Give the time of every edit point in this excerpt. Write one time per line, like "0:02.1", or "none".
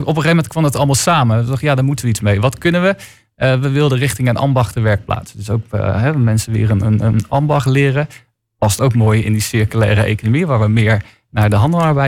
none